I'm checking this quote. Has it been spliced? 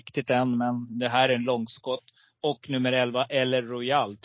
no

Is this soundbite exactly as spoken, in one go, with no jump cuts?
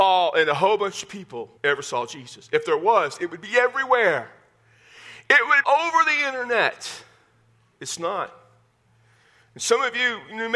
no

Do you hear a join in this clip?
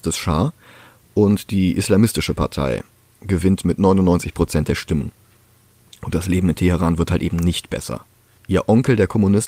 no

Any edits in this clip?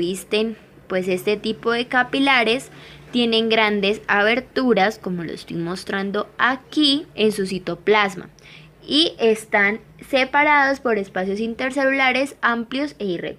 yes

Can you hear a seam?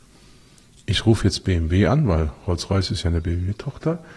no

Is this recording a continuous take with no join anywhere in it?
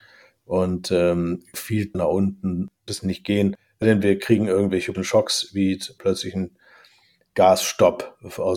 no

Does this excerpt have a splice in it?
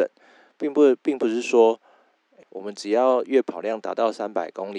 yes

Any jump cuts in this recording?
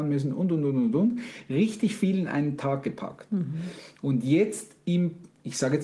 no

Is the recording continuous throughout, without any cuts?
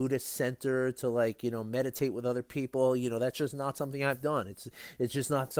yes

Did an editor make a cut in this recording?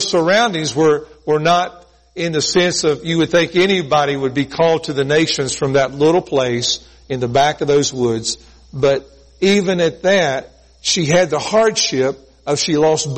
no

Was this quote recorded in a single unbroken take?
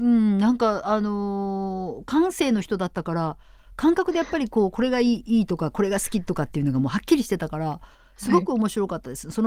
yes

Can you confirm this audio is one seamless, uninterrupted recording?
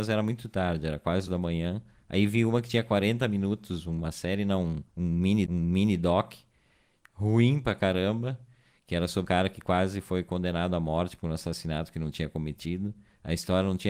no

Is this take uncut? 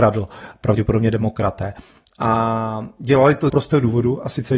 no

